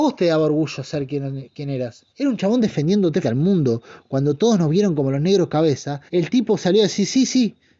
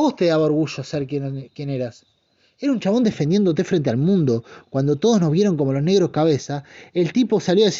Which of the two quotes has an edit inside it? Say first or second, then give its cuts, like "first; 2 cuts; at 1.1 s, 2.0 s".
first; 3 cuts; at 2.1 s, 3.2 s, 6.1 s